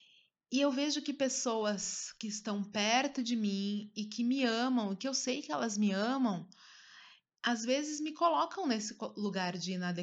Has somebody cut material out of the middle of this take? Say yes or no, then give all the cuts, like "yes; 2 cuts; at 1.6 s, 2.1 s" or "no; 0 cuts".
no; 0 cuts